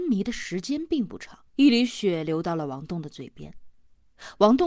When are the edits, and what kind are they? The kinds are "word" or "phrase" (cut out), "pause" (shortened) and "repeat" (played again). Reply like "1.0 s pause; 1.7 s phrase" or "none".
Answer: 1.5 s pause